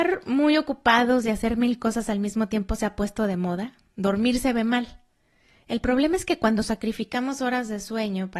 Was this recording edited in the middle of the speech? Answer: no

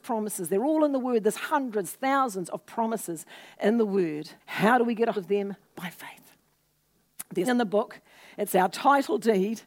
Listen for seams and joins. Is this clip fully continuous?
no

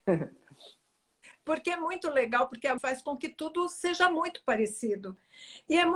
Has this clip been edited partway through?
yes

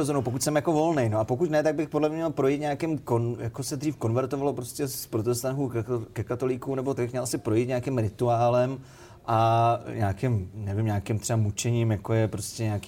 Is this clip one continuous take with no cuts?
no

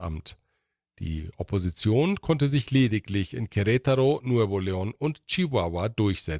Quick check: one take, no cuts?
yes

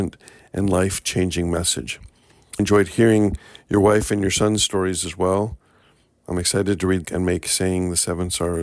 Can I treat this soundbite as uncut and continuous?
no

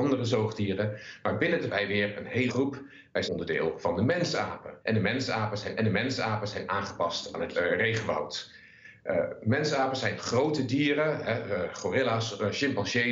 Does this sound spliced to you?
yes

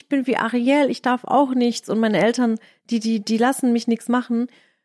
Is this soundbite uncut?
yes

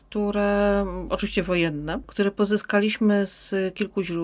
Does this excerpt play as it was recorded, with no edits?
yes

